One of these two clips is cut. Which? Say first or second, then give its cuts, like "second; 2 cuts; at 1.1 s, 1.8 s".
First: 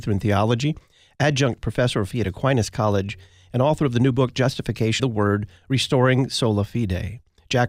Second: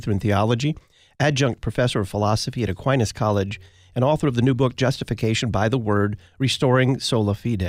first; 2 cuts; at 2.1 s, 5.0 s